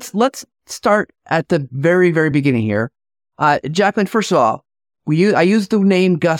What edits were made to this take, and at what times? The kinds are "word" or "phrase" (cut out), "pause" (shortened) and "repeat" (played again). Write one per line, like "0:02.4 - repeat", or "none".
none